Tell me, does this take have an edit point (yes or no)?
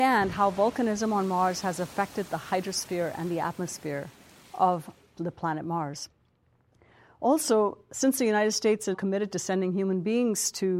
yes